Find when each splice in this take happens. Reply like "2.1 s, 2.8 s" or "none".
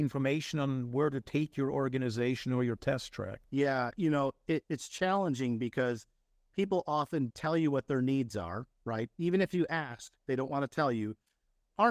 3.4 s, 4.6 s, 7.3 s